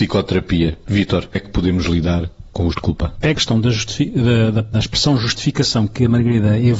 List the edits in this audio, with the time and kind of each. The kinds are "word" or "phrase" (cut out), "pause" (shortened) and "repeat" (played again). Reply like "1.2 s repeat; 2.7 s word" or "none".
1.3 s word; 2.7 s word; 3.3 s word; 4.7 s word

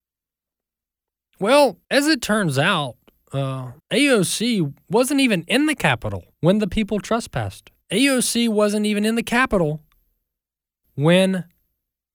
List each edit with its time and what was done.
1.8 s pause; 3.8 s pause; 6.3 s pause; 7.8 s pause

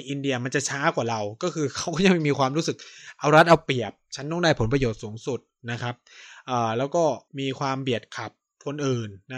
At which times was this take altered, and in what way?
7.3 s pause

